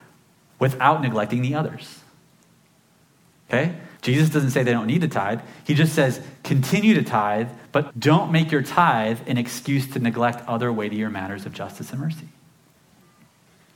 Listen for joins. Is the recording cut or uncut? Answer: cut